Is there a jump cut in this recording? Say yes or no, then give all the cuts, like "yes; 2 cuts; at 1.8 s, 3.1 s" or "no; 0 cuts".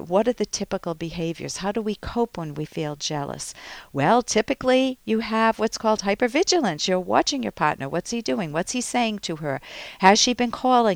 no; 0 cuts